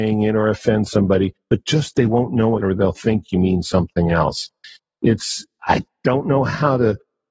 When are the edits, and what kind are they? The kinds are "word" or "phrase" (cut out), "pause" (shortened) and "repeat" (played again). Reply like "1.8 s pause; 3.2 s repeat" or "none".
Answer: 1.4 s pause; 2.6 s phrase; 5.6 s word